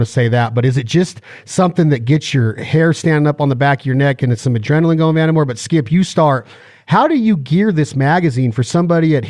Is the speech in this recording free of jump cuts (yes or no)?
yes